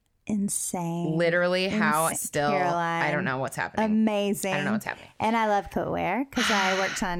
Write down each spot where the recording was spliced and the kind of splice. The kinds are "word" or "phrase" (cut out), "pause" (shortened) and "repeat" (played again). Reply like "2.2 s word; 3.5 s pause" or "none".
2.1 s word; 5.7 s word

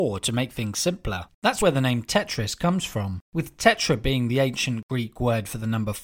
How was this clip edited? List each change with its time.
1.3 s pause; 3.2 s pause

